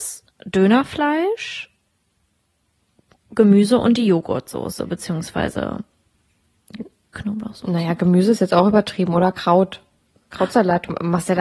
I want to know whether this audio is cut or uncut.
uncut